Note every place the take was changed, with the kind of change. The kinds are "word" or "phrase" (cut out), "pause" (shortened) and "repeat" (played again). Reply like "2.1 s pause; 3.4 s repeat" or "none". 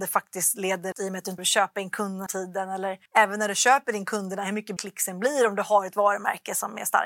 0.9 s word; 1.4 s word; 2.3 s word; 3.1 s pause; 4.8 s word